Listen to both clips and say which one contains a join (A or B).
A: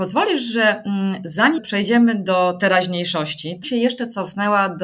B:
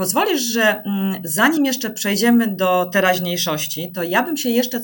A